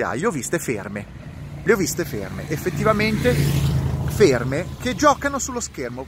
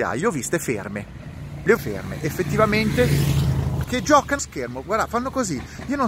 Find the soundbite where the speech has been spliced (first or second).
second